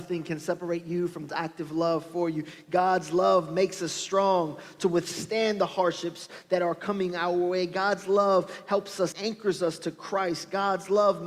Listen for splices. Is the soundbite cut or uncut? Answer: cut